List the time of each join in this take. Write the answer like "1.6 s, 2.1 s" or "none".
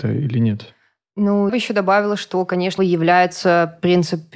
1.5 s, 2.8 s